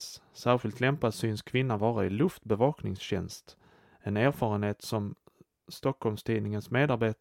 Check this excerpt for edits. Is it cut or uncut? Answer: uncut